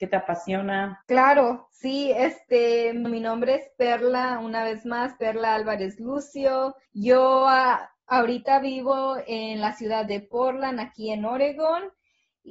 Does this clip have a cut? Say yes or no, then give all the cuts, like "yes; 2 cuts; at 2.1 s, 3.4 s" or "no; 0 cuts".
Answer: yes; 3 cuts; at 1.0 s, 3.0 s, 6.9 s